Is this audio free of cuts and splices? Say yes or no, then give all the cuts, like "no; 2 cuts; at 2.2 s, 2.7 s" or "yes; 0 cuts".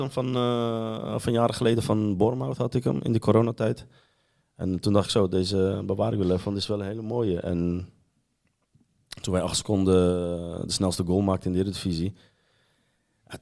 yes; 0 cuts